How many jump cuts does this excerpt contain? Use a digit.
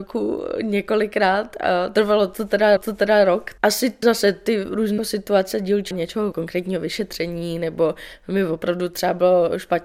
6